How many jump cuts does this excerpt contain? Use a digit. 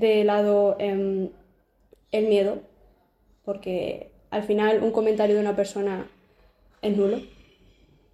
0